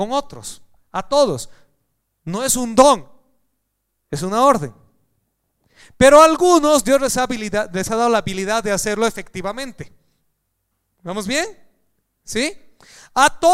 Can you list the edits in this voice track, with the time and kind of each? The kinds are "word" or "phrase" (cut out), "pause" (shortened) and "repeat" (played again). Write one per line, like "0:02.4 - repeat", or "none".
none